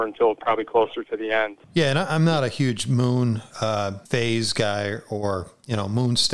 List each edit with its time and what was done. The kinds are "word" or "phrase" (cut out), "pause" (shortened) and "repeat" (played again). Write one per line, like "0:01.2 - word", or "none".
0:01.6 - pause
0:04.1 - pause